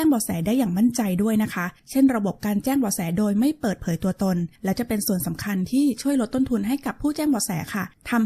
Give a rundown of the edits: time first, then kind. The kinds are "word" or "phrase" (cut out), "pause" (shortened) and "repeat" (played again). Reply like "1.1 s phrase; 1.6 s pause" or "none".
1.8 s pause; 4.6 s pause